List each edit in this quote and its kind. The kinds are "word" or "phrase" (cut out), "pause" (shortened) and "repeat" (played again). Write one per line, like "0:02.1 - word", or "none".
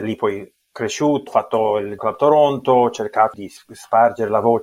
0:01.3 - word
0:02.0 - word
0:03.3 - word